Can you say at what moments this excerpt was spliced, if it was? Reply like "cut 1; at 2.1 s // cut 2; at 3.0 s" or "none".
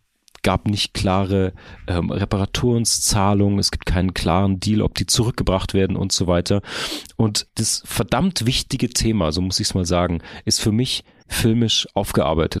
cut 1; at 7.5 s // cut 2; at 11.2 s